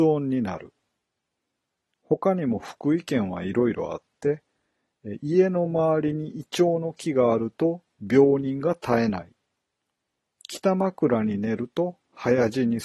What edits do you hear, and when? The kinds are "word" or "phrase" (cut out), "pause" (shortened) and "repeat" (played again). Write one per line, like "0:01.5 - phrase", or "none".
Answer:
none